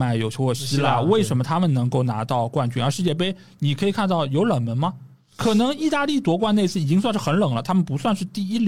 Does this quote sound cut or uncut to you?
uncut